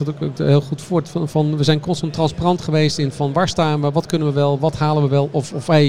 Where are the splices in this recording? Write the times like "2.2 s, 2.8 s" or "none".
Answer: none